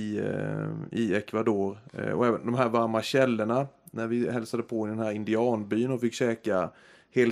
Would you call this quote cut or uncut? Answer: uncut